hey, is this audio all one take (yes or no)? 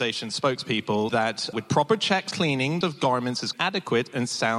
no